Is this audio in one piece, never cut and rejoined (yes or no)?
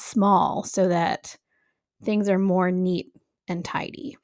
yes